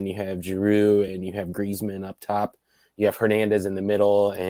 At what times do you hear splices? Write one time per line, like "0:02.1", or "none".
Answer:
none